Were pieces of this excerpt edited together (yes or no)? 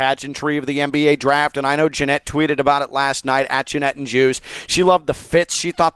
no